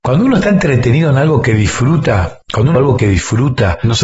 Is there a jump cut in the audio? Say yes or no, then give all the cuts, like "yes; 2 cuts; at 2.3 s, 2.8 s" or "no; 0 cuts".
yes; 2 cuts; at 2.4 s, 2.8 s